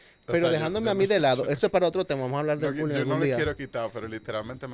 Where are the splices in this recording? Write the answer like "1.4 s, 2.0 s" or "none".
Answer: none